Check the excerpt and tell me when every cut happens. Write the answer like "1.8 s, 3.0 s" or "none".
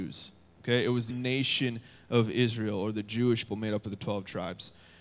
1.1 s, 3.5 s